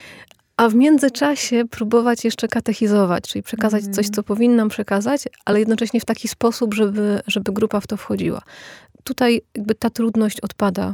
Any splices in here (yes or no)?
no